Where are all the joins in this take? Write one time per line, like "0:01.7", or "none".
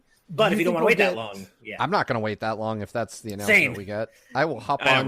none